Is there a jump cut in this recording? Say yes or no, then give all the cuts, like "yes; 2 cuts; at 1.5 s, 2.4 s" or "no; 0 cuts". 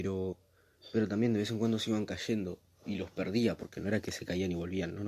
no; 0 cuts